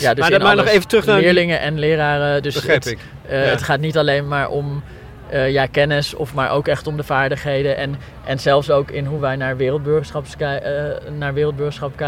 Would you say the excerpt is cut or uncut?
uncut